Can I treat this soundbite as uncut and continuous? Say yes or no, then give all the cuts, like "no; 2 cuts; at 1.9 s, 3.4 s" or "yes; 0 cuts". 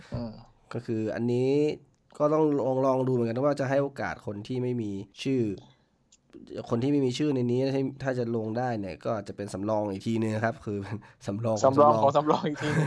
no; 2 cuts; at 1.9 s, 5.1 s